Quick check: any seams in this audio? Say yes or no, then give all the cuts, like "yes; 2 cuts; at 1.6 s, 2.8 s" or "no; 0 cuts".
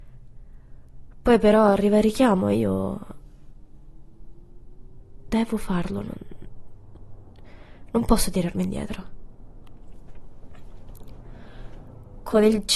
no; 0 cuts